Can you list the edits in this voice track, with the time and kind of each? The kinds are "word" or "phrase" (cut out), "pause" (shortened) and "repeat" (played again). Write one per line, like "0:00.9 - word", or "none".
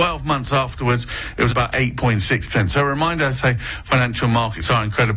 0:01.5 - phrase

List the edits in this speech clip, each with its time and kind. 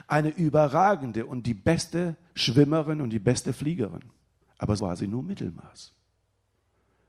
0:04.8 - word

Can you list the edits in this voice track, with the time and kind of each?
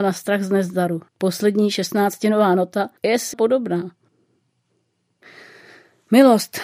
0:01.1 - pause
0:03.0 - pause
0:03.3 - word

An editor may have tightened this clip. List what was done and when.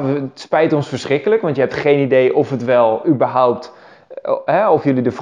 none

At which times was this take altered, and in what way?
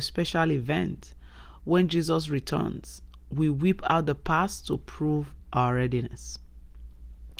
none

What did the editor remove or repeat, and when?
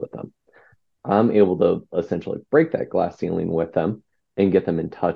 none

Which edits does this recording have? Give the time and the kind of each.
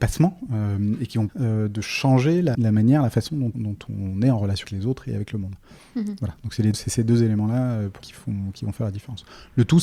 0:01.3 - word
0:02.5 - word
0:03.5 - word
0:04.6 - word
0:06.7 - word
0:08.0 - word

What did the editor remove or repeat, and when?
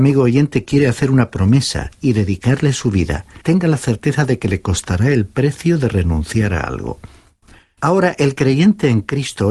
0:03.4 - pause

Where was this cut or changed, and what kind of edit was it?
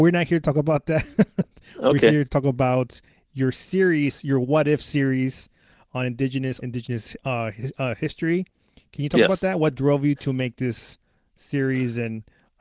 0:06.6 - word

